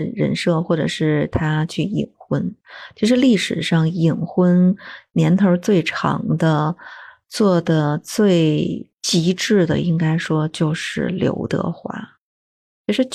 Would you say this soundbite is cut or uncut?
uncut